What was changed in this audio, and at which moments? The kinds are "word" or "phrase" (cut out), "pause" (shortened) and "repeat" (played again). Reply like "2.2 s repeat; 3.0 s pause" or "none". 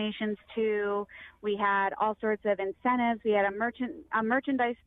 none

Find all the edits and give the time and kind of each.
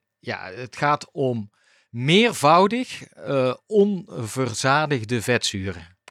none

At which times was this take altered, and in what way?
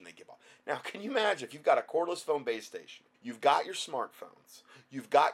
3.1 s pause

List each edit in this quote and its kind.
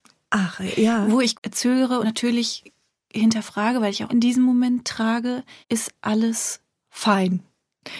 1.3 s word; 2.0 s phrase; 4.1 s phrase; 5.6 s pause

